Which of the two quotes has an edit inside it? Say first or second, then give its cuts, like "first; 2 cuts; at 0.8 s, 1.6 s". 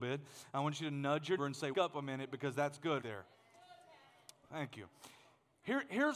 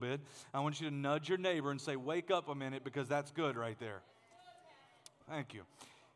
first; 3 cuts; at 1.4 s, 1.7 s, 3.0 s